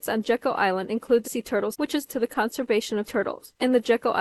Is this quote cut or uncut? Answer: cut